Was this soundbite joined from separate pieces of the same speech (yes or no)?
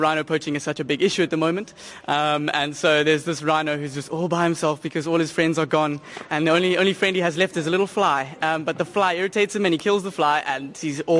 no